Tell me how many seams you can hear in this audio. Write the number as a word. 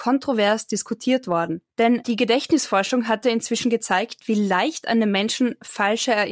one